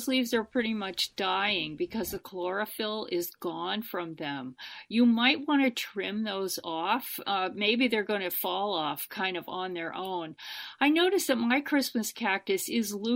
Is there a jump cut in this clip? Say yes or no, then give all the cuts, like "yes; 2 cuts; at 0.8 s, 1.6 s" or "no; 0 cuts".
no; 0 cuts